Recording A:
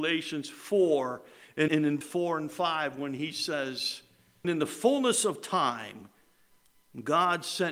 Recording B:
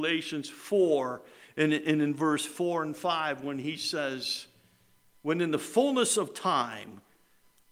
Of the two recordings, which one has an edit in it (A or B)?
A